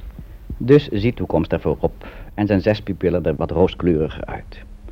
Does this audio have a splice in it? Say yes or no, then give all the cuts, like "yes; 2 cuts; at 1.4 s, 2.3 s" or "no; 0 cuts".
yes; 2 cuts; at 1.2 s, 3.4 s